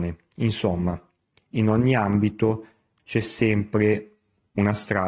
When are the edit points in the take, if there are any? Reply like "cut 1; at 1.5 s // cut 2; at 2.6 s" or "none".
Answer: none